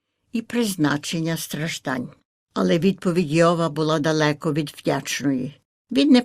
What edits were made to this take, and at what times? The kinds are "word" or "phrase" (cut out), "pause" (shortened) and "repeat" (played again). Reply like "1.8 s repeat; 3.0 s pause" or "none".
none